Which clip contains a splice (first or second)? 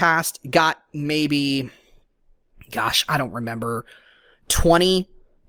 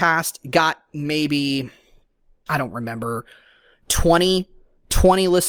second